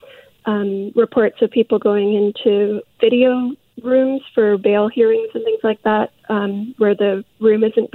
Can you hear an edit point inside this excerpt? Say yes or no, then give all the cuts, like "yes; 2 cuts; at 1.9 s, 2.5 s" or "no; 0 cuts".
yes; 1 cut; at 3.0 s